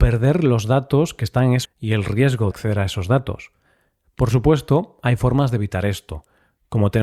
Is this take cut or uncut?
cut